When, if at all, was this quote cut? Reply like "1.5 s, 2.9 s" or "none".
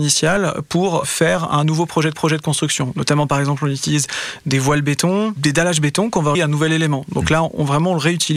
2.1 s, 6.3 s